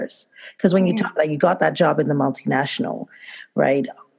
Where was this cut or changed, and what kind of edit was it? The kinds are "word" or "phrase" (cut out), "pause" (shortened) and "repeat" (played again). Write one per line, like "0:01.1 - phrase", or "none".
0:01.2 - word